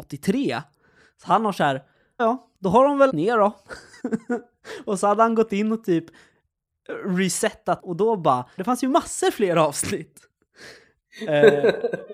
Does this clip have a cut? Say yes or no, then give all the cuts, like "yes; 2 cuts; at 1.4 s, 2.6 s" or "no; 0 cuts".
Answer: yes; 6 cuts; at 2.2 s, 2.5 s, 3.1 s, 4.0 s, 7.8 s, 8.6 s